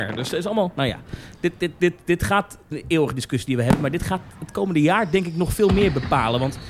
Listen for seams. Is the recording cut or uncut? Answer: cut